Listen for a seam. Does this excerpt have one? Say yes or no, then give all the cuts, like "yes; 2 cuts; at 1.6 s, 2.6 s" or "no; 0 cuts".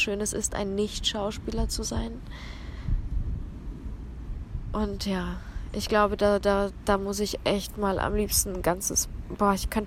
no; 0 cuts